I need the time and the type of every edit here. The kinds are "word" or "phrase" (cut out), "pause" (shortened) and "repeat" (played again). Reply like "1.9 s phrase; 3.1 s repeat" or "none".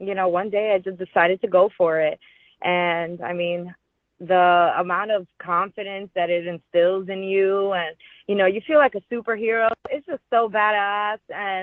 none